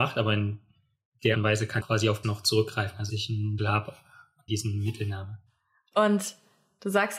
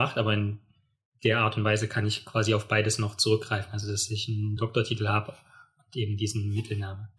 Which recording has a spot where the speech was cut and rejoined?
first; 6 cuts; at 1.3 s, 1.8 s, 2.2 s, 3.1 s, 3.6 s, 4.5 s

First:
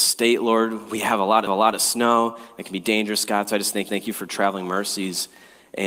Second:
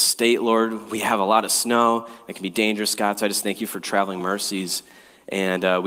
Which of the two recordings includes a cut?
first; 2 cuts; at 1.5 s, 3.9 s

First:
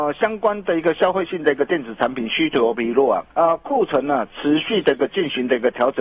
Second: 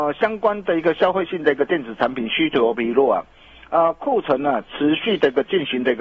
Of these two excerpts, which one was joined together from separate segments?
first; 1 cut; at 3.3 s

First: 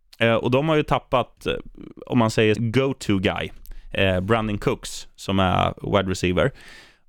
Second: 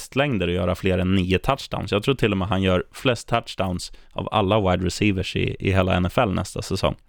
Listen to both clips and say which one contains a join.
first; 1 cut; at 2.5 s

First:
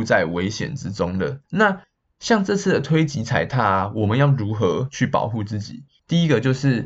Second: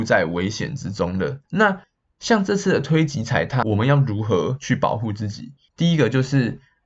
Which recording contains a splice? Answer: second; 1 cut; at 3.6 s

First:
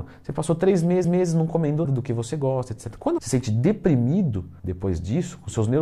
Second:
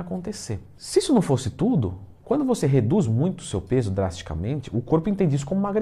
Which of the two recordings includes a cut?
first; 4 cuts; at 1.0 s, 1.8 s, 3.2 s, 4.6 s

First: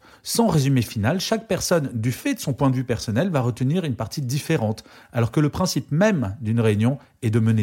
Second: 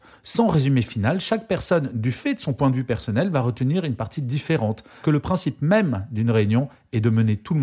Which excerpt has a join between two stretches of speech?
second; 1 cut; at 5.0 s

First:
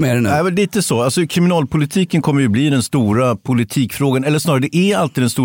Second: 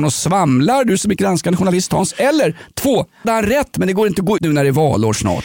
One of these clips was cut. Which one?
second; 3 cuts; at 1.2 s, 3.2 s, 4.4 s

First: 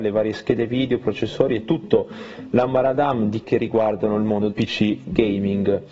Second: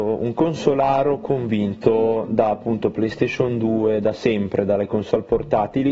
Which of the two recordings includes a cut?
first; 2 cuts; at 3.4 s, 4.5 s

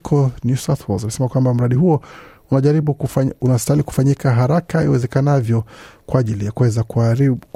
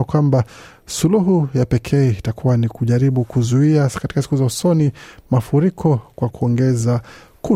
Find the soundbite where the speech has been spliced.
second; 1 cut; at 6.3 s

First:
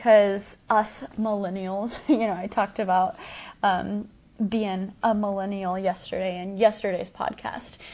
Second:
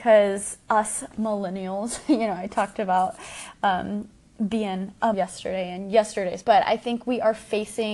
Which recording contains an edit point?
second; 2 cuts; at 5.1 s, 6.4 s

